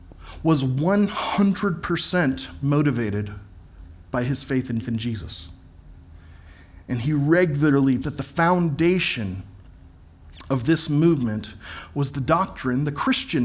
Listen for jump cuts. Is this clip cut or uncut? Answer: cut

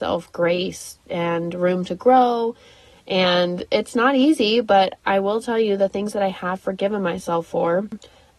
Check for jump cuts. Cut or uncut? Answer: uncut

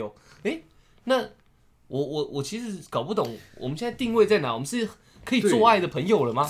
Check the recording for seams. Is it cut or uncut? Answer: uncut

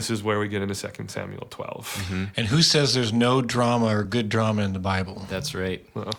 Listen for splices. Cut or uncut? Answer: uncut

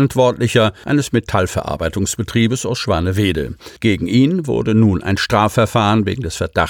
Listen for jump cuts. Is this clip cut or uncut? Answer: cut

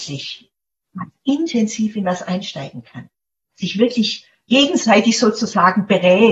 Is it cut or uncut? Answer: uncut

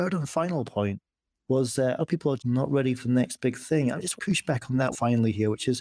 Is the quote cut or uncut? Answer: cut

